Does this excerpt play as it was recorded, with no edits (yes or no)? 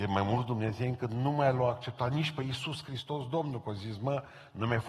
yes